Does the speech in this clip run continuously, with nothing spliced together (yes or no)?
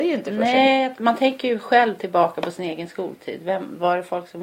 yes